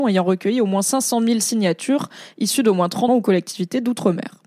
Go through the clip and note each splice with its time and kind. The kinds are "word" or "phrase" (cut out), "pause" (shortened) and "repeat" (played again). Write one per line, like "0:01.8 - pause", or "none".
0:03.1 - word